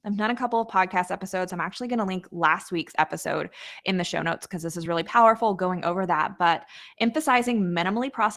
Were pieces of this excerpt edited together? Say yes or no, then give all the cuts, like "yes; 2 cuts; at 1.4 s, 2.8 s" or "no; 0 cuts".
no; 0 cuts